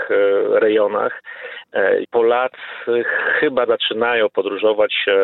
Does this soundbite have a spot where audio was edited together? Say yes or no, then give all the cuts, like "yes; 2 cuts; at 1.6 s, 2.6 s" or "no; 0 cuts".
yes; 2 cuts; at 2.0 s, 3.7 s